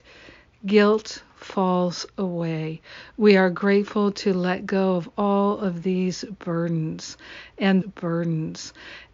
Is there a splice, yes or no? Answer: yes